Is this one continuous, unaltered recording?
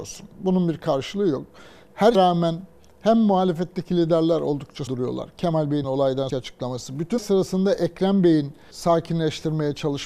no; 6 cuts; at 2.1 s, 4.9 s, 5.8 s, 6.3 s, 7.2 s, 8.7 s

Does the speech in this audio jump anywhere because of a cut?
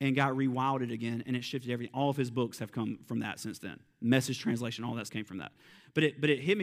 yes; 1 cut; at 5.1 s

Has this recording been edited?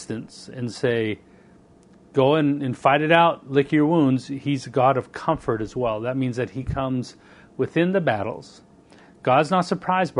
no; 0 cuts

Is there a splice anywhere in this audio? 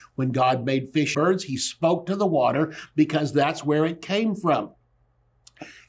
yes; 1 cut; at 1.1 s

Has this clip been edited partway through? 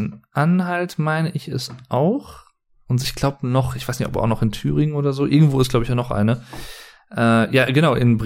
no; 0 cuts

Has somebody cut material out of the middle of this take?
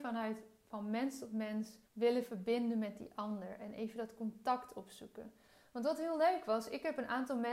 yes; 1 cut; at 1.8 s

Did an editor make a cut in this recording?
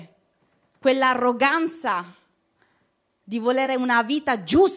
no; 0 cuts

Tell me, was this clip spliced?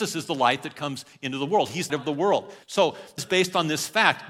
yes; 3 cuts; at 1.9 s, 2.6 s, 3.2 s

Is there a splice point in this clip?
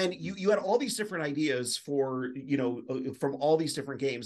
no; 0 cuts

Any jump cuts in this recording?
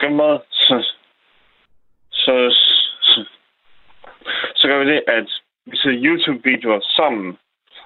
no; 0 cuts

